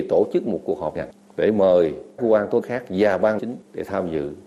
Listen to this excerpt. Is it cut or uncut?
cut